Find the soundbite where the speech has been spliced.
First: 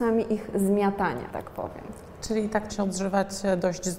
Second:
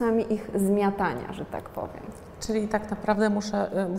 first; 2 cuts; at 1.3 s, 2.7 s

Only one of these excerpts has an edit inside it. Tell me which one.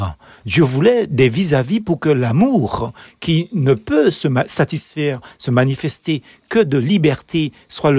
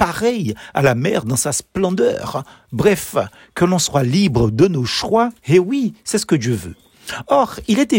second; 1 cut; at 5.4 s

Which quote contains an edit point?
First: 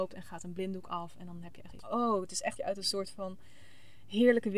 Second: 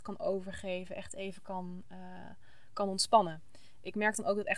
first; 2 cuts; at 1.8 s, 2.6 s

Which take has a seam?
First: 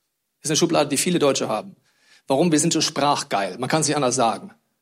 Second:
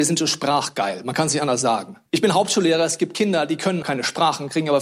second; 2 cuts; at 2.1 s, 3.8 s

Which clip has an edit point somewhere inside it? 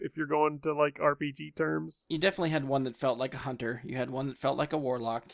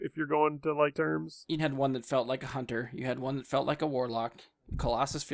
second; 2 cuts; at 0.9 s, 1.6 s

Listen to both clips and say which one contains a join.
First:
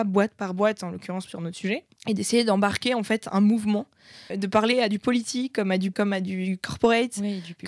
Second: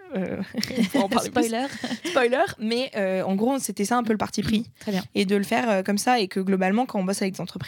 first; 3 cuts; at 2.0 s, 4.3 s, 5.9 s

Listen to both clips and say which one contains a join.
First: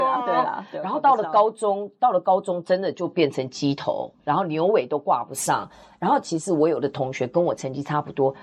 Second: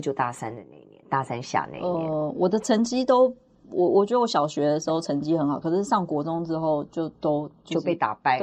first; 1 cut; at 4.2 s

